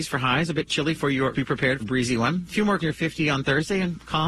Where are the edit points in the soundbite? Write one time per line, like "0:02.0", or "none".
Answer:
0:01.3
0:01.8
0:02.8